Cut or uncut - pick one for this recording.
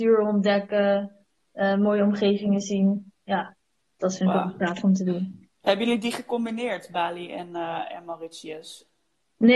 uncut